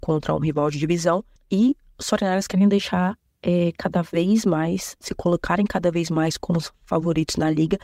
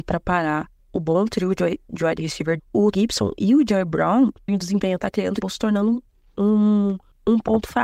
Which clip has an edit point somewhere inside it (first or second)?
second